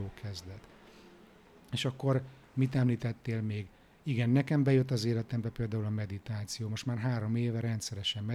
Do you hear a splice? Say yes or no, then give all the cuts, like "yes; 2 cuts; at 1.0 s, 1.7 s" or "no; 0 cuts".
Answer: no; 0 cuts